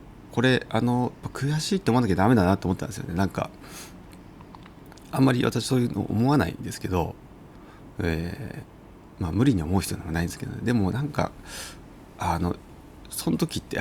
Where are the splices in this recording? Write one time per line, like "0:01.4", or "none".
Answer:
none